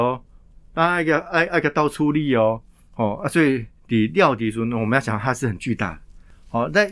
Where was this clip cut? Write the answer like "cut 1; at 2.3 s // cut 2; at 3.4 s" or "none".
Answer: cut 1; at 2.8 s